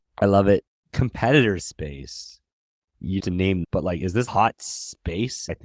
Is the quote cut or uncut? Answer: cut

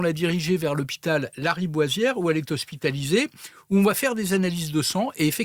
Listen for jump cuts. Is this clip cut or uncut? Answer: uncut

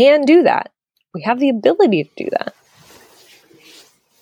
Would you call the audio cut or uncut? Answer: uncut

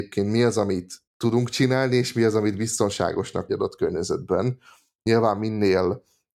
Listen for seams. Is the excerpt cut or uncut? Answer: cut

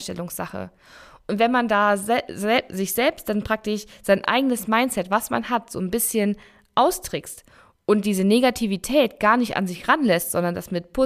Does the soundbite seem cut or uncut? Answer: uncut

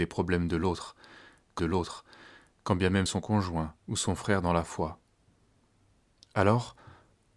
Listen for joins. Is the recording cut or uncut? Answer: cut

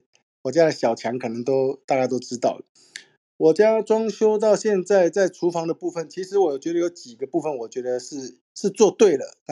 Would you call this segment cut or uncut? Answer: cut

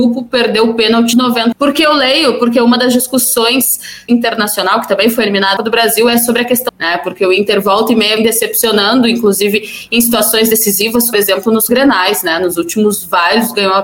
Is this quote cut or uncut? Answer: cut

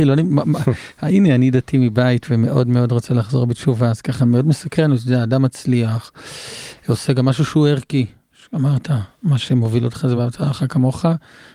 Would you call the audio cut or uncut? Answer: uncut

